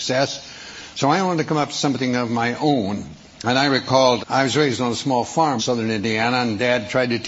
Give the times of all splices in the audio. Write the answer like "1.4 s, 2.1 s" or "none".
4.2 s, 5.6 s